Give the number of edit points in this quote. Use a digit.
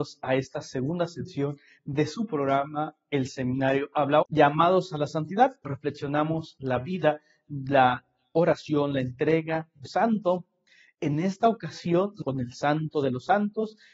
4